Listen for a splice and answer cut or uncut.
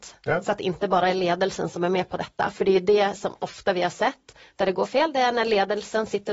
uncut